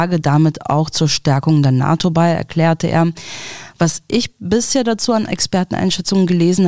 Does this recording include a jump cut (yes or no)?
no